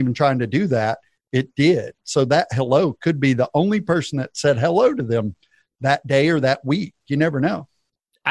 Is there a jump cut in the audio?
no; 0 cuts

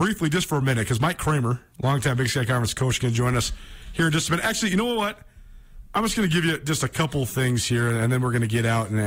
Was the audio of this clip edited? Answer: no; 0 cuts

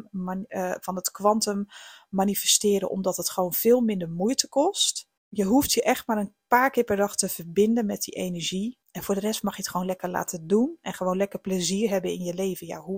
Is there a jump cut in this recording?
yes; 2 cuts; at 5.2 s, 8.8 s

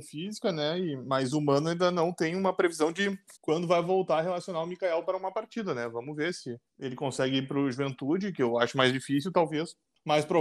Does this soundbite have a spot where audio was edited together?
yes; 2 cuts; at 3.4 s, 6.7 s

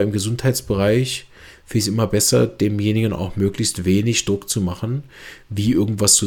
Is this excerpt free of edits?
yes; 0 cuts

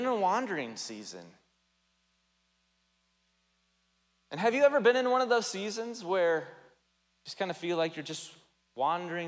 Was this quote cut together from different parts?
no; 0 cuts

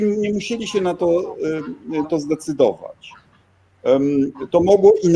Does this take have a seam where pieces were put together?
yes; 1 cut; at 2.0 s

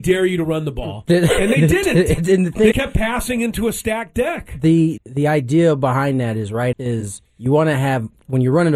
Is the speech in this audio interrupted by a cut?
yes; 4 cuts; at 2.7 s, 5.0 s, 6.7 s, 7.3 s

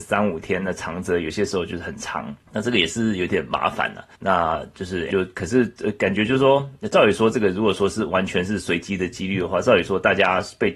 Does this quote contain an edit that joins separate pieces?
yes; 3 cuts; at 2.4 s, 4.2 s, 5.1 s

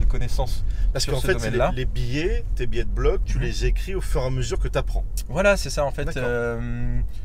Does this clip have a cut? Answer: no; 0 cuts

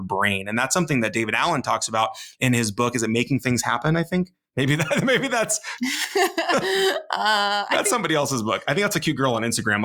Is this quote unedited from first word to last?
yes; 0 cuts

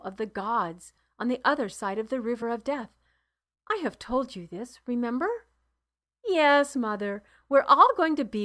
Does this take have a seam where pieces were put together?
no; 0 cuts

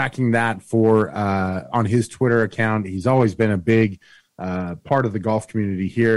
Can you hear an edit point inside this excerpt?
no; 0 cuts

